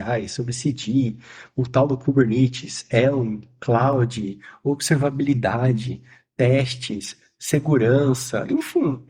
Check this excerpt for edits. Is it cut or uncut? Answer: uncut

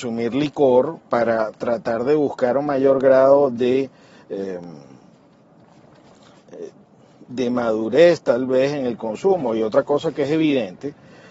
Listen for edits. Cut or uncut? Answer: uncut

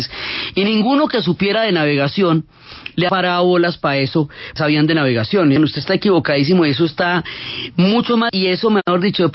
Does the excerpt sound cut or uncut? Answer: cut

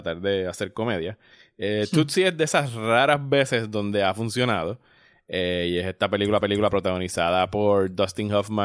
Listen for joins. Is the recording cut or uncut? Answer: cut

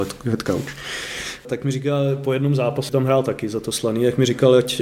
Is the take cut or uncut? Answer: cut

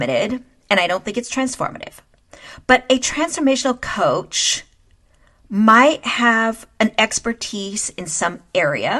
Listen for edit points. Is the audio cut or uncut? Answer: uncut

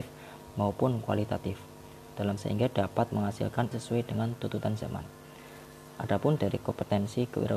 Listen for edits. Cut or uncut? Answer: cut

